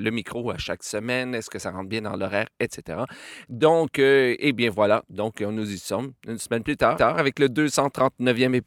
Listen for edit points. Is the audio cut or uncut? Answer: cut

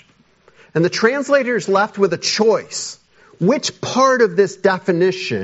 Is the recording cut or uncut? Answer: uncut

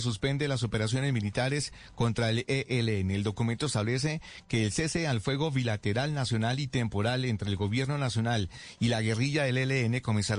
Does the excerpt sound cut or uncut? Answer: uncut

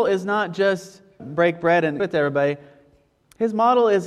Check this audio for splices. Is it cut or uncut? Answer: cut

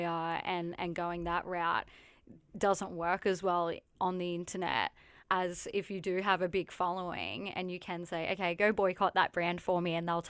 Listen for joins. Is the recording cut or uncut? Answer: uncut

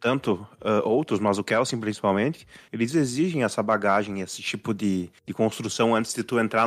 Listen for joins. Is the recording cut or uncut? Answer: uncut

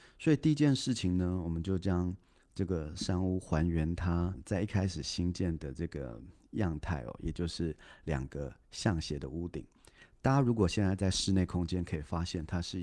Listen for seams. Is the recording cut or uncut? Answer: uncut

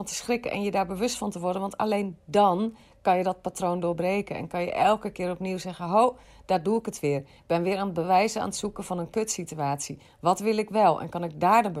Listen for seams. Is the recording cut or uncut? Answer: uncut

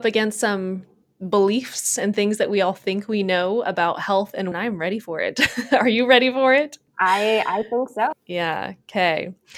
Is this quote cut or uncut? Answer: cut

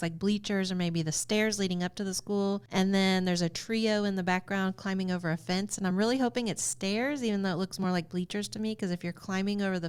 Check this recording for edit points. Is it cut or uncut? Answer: uncut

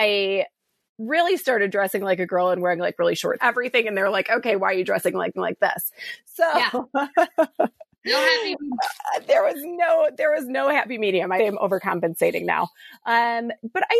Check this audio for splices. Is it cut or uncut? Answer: cut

